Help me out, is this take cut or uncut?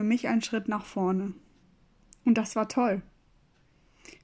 uncut